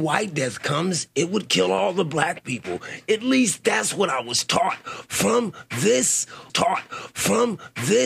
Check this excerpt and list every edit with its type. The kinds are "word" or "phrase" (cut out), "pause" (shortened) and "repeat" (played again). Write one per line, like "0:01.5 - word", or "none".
0:06.5 - repeat